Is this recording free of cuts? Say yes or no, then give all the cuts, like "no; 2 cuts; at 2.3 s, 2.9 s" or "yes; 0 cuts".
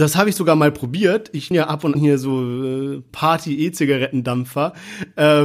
no; 3 cuts; at 1.5 s, 1.9 s, 3.1 s